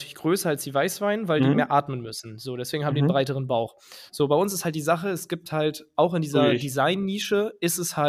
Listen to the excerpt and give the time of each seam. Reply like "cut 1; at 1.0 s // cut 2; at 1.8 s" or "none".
none